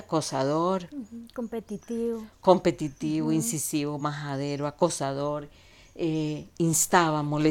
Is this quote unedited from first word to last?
yes; 0 cuts

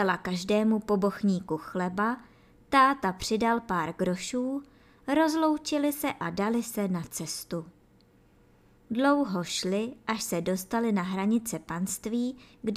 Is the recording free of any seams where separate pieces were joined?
yes; 0 cuts

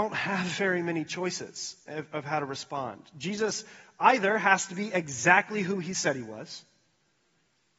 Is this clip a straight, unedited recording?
yes; 0 cuts

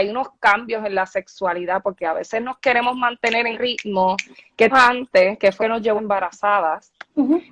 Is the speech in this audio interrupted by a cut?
yes; 4 cuts; at 3.5 s, 4.7 s, 5.6 s, 6.0 s

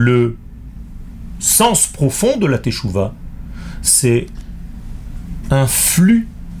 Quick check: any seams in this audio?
no; 0 cuts

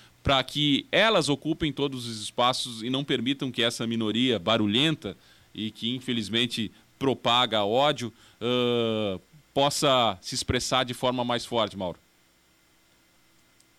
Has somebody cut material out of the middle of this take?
no; 0 cuts

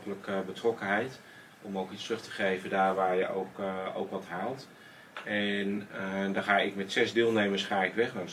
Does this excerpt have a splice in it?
no; 0 cuts

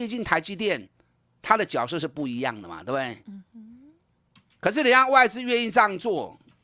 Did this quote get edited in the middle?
no; 0 cuts

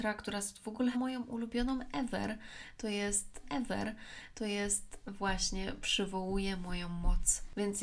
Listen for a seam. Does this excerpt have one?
yes; 2 cuts; at 0.9 s, 3.4 s

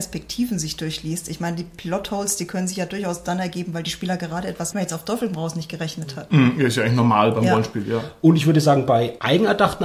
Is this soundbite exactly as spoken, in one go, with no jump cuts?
no; 1 cut; at 4.7 s

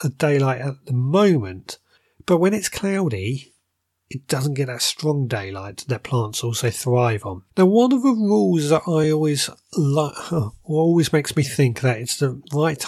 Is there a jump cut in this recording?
no; 0 cuts

